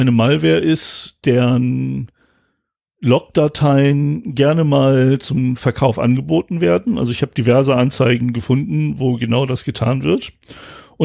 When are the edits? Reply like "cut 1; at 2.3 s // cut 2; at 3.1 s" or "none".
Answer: none